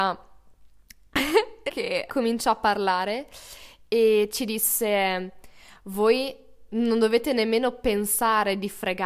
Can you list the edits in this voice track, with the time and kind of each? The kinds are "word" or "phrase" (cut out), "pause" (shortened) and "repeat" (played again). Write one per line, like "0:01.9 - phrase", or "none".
0:01.7 - word
0:02.1 - word